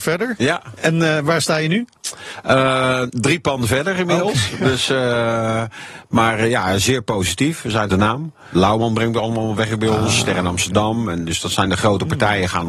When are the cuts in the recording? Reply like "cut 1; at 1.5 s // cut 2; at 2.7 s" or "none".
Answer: cut 1; at 7.9 s